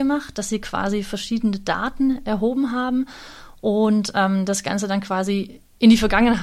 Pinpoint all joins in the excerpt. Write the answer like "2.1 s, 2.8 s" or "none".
none

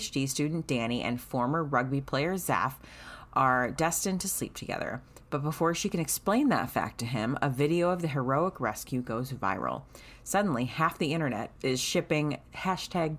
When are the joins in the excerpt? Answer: 11.6 s

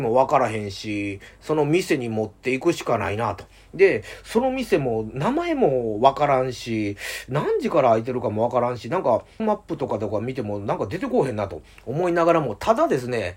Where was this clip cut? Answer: 9.4 s

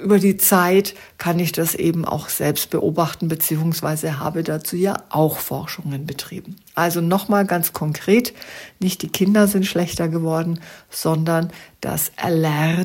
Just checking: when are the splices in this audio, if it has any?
none

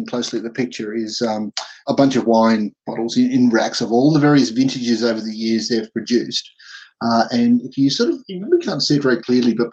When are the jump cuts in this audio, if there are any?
1.9 s, 2.8 s

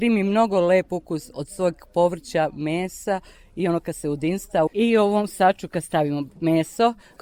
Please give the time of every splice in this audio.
4.7 s

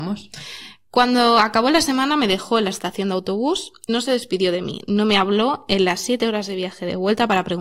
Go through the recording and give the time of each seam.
3.9 s

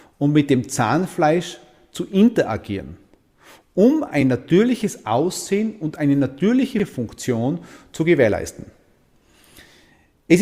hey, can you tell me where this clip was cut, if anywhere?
none

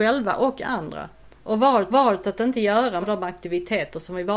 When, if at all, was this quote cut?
1.3 s, 1.9 s, 3.0 s

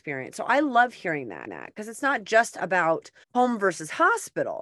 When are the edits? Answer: 1.5 s, 3.2 s

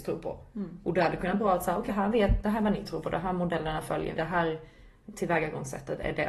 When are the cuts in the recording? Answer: 1.9 s, 4.2 s

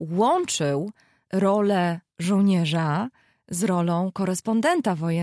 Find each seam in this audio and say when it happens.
2.1 s

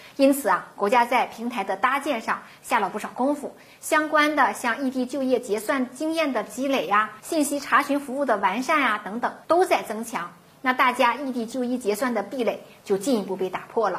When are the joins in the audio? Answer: 7.2 s, 9.4 s

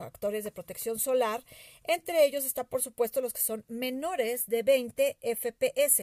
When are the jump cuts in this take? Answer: none

